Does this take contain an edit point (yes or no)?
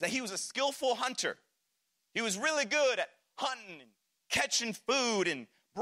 no